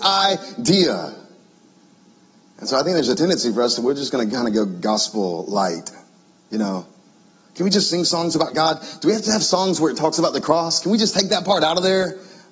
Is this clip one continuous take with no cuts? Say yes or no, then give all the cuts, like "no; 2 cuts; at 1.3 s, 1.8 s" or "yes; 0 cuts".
yes; 0 cuts